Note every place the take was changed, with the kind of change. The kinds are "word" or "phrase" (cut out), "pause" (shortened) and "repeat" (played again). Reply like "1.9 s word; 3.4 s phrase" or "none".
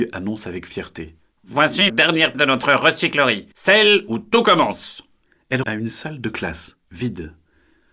1.9 s word; 2.3 s word; 3.5 s pause; 5.6 s word